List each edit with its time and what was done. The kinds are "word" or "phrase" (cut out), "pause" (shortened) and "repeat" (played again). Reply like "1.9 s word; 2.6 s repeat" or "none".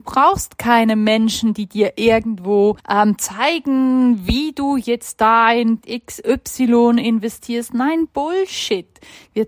2.8 s pause; 5.8 s word

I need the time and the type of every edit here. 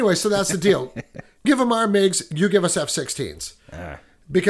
1.4 s word

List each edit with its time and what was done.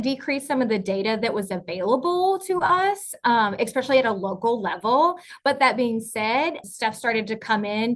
6.6 s word

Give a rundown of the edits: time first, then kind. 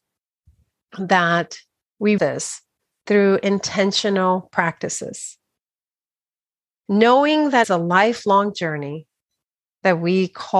2.2 s word; 7.6 s word

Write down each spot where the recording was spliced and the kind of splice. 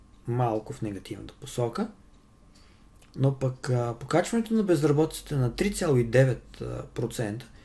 none

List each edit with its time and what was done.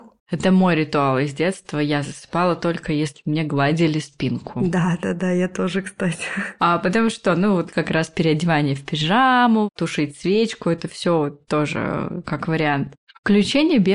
none

